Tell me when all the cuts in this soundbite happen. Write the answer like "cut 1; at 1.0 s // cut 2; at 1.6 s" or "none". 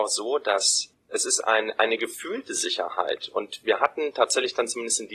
none